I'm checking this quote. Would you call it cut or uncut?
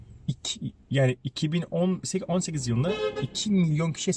uncut